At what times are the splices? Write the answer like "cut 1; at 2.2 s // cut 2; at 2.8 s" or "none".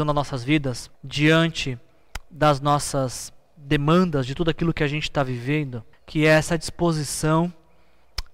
cut 1; at 0.9 s // cut 2; at 5.9 s